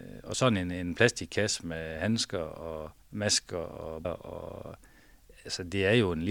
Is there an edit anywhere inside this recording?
yes; 2 cuts; at 3.0 s, 4.0 s

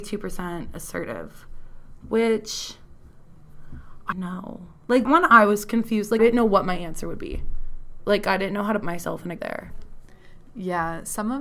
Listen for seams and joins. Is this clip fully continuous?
no; 5 cuts; at 4.1 s, 5.1 s, 6.2 s, 8.8 s, 9.4 s

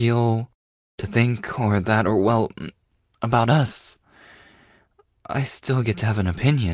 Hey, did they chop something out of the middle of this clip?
no; 0 cuts

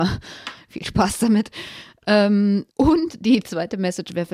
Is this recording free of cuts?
no; 1 cut; at 2.7 s

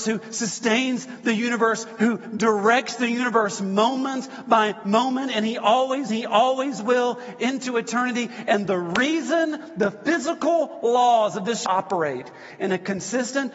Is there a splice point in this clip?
yes; 2 cuts; at 6.1 s, 11.6 s

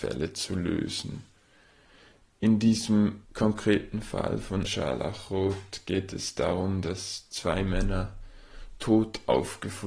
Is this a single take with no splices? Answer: no; 2 cuts; at 3.2 s, 4.6 s

